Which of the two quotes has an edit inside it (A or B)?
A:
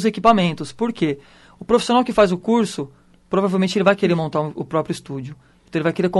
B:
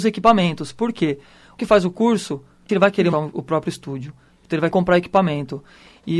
B